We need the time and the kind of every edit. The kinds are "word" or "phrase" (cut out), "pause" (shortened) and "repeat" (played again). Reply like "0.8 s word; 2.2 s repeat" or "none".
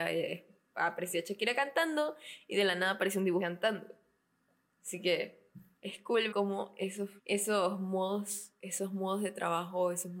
3.4 s phrase; 5.7 s pause; 6.3 s word; 7.2 s pause